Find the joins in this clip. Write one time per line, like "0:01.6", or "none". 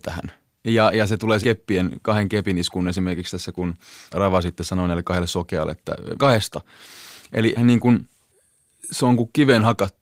0:01.4
0:04.1
0:06.2
0:07.5

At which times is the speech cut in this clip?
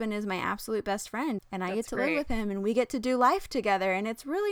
0:01.4

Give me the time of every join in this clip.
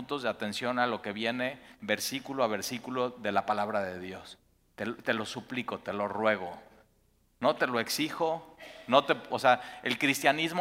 none

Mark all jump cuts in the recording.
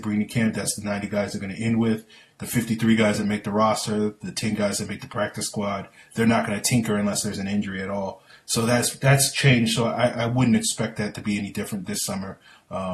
none

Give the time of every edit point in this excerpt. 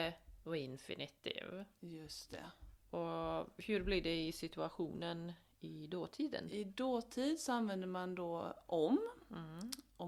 none

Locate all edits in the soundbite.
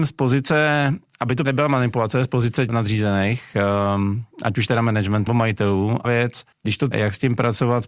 0:01.4
0:02.7
0:04.3
0:05.3
0:06.0
0:06.5
0:06.9

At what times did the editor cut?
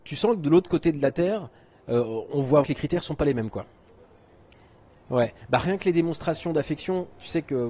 0:02.6

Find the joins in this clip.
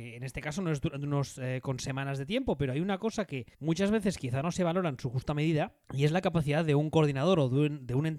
0:03.5
0:05.8

